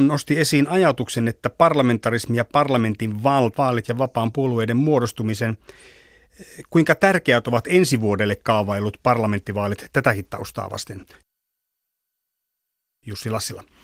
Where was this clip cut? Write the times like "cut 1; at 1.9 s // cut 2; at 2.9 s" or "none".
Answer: cut 1; at 3.5 s